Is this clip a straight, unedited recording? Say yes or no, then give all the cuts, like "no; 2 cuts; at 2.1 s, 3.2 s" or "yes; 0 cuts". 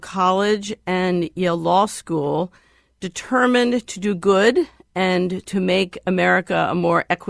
yes; 0 cuts